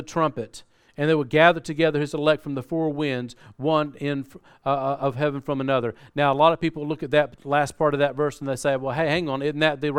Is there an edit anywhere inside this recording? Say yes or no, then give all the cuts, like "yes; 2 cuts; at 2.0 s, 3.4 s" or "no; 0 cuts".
no; 0 cuts